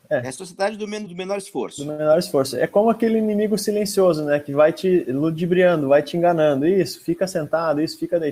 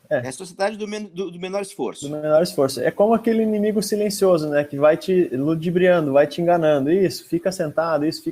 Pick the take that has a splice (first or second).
first